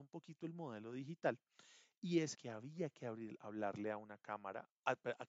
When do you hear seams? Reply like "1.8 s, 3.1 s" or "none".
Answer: 2.3 s